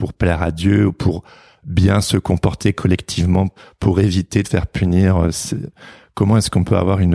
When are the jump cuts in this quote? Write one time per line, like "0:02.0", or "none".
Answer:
0:04.4